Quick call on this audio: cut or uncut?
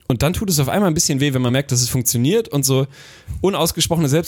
uncut